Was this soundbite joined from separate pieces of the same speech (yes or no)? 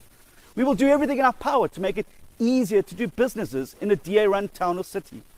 no